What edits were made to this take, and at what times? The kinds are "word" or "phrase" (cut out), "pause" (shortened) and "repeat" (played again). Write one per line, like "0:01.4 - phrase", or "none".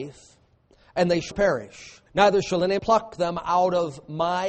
0:01.3 - word
0:02.1 - pause
0:02.8 - word